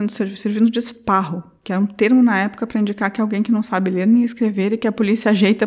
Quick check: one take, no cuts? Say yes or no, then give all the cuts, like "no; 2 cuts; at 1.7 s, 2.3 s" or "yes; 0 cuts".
yes; 0 cuts